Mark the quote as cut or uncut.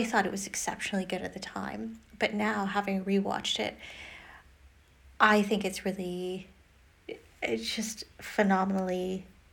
uncut